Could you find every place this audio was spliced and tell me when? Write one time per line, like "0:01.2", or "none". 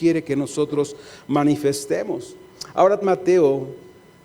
0:03.0

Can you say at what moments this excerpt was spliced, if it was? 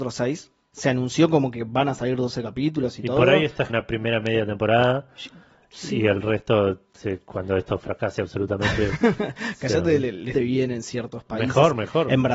0:03.7
0:10.3

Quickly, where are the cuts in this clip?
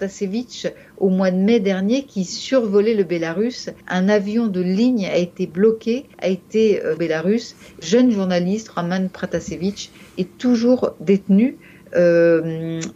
0:03.8
0:06.1
0:07.0
0:07.8

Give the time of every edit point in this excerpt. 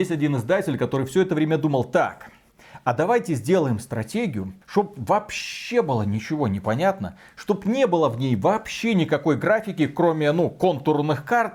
0:04.6

